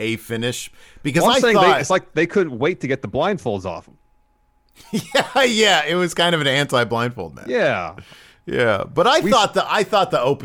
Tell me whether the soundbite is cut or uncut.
uncut